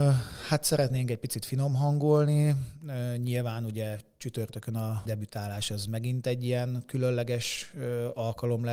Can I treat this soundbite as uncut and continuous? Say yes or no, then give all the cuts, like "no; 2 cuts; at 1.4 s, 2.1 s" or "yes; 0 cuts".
no; 1 cut; at 5.1 s